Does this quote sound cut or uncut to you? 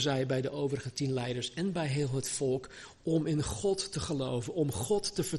uncut